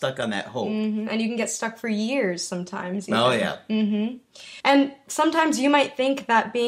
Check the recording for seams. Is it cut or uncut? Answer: cut